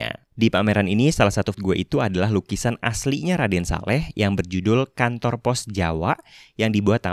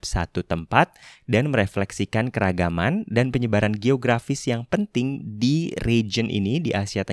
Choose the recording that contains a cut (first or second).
first